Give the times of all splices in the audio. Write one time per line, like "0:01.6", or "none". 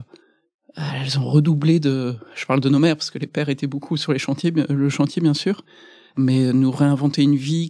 none